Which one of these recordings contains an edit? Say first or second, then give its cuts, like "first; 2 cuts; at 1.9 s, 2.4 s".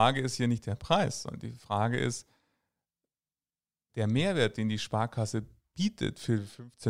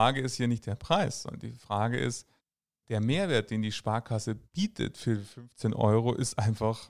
second; 2 cuts; at 2.4 s, 4.4 s